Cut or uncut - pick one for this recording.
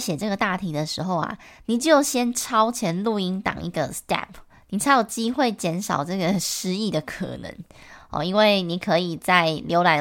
cut